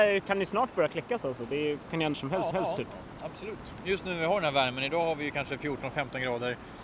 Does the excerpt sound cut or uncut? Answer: cut